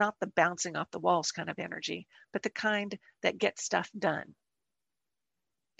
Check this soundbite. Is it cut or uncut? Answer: uncut